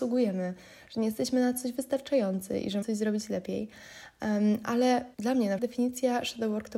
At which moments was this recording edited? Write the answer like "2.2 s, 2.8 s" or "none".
2.8 s, 5.1 s, 5.6 s